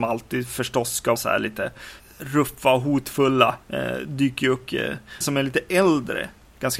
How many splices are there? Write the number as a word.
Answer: four